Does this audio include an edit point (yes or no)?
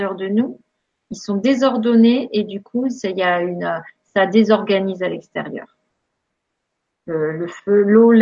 no